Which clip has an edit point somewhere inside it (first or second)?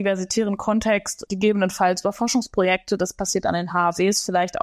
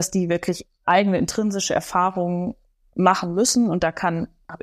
first